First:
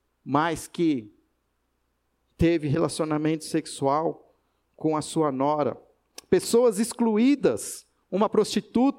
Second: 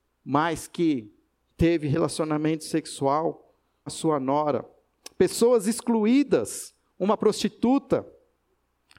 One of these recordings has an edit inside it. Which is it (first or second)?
second